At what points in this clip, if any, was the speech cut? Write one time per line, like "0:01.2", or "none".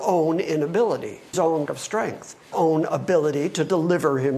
0:01.3
0:01.7
0:02.5